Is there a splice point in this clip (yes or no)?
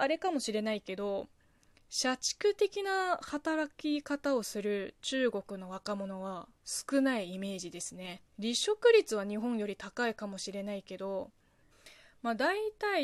yes